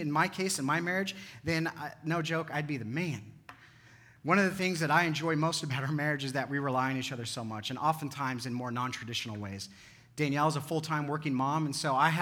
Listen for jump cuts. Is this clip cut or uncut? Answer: uncut